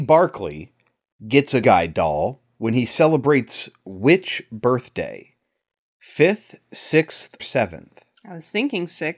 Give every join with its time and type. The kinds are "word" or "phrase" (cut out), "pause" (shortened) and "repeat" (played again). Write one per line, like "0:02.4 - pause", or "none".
0:01.6 - word
0:07.4 - word